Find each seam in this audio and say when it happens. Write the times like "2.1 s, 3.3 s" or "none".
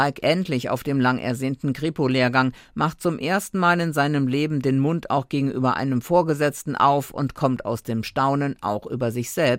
none